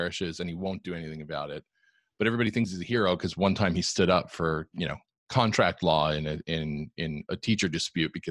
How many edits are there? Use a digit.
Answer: 0